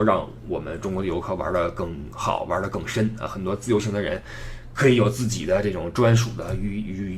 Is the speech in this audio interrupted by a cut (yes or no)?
no